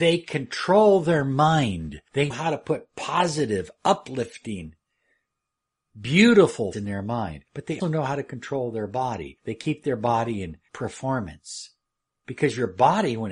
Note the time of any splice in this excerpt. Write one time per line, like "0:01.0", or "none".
0:02.3
0:06.7
0:07.8
0:10.7